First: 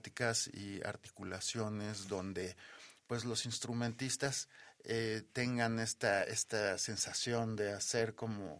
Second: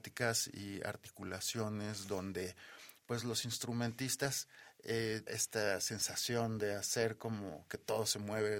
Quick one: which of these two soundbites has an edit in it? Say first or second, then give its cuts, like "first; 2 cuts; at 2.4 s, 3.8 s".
second; 1 cut; at 5.3 s